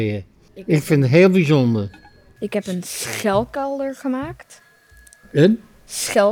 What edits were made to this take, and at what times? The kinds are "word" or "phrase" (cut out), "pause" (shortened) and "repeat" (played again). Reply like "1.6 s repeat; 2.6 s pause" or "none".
none